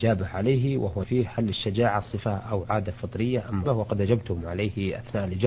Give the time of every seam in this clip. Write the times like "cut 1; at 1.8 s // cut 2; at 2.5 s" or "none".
cut 1; at 1.0 s // cut 2; at 3.6 s